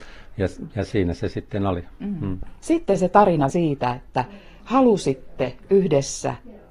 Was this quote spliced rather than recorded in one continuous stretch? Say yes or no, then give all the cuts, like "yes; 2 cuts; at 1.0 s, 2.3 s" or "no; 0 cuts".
yes; 1 cut; at 3.5 s